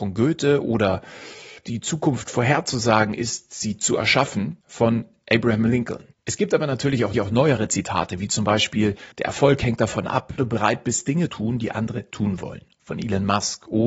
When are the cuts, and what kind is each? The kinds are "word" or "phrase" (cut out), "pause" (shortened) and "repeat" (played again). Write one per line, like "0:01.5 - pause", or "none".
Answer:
0:01.6 - phrase
0:04.6 - pause
0:06.1 - pause
0:07.1 - repeat
0:09.1 - pause
0:10.4 - phrase
0:11.3 - word
0:12.1 - word